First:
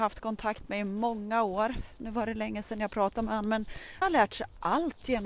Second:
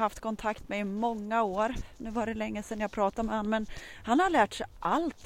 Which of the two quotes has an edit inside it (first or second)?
first